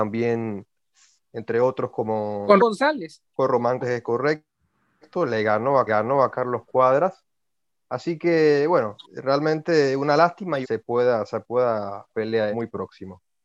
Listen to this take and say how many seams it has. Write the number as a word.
eight